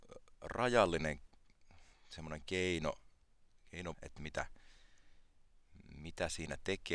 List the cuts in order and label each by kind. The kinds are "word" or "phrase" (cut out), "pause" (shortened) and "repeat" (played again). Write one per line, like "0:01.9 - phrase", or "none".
0:03.9 - word